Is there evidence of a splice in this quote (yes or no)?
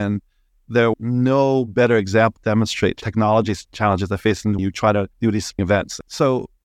yes